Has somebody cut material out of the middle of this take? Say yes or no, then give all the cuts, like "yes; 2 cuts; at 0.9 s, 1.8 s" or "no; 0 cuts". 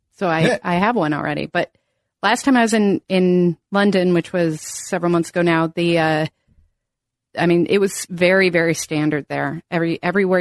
no; 0 cuts